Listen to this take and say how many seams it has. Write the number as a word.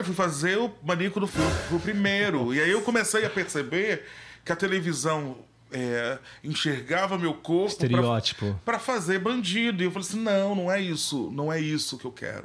one